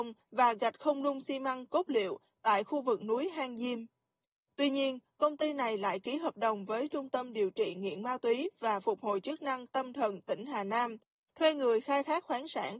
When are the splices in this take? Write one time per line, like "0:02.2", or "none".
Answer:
none